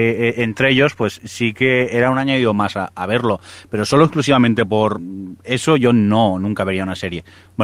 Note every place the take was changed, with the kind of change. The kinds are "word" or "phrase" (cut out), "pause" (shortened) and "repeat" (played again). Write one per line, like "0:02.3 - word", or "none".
none